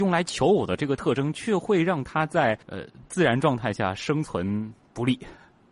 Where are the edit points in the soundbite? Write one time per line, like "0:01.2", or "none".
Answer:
0:02.6